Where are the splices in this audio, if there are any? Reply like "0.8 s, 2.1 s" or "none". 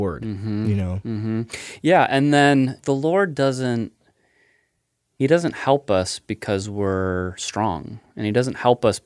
none

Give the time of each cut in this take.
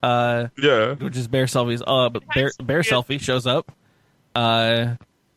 1.0 s, 2.1 s

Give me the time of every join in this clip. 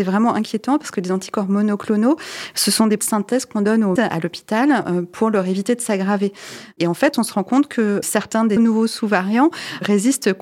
3.0 s, 4.0 s, 8.0 s, 8.6 s

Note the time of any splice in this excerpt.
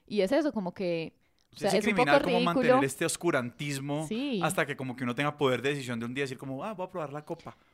1.7 s

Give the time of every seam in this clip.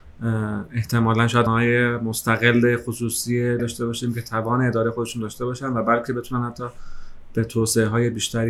1.5 s, 3.6 s

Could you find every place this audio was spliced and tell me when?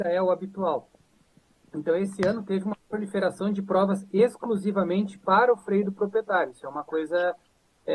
none

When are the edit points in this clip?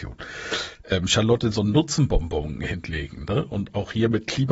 1.5 s

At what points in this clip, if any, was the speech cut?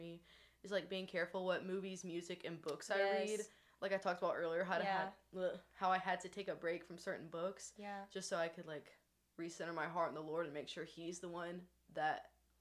none

